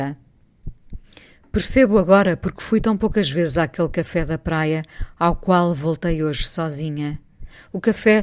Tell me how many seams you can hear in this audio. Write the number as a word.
zero